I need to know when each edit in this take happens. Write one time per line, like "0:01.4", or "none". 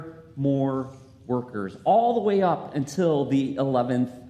none